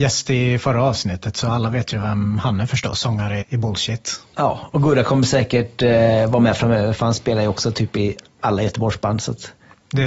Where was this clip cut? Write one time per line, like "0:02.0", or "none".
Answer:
0:03.4

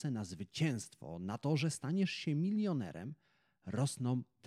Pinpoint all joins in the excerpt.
none

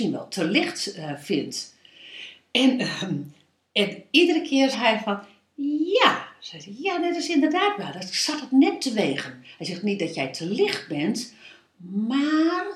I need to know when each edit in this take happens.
0:04.7

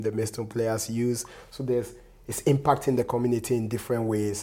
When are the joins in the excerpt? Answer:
none

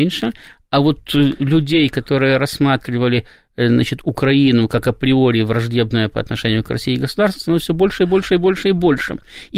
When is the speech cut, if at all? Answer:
none

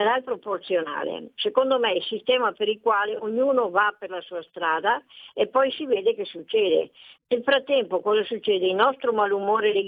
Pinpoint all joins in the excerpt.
none

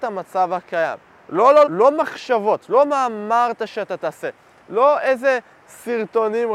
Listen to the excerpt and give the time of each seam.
0:01.1
0:01.7

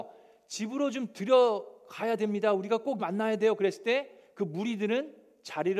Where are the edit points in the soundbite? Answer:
0:03.0

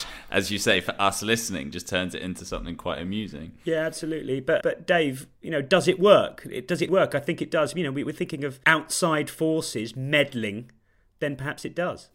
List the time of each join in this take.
0:04.6
0:06.9

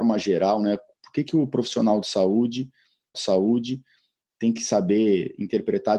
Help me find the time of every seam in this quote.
0:03.1

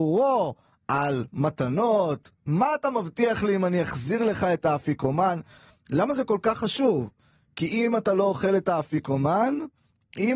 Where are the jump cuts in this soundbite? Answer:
none

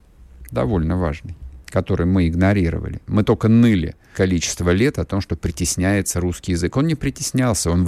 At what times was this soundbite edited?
0:04.1

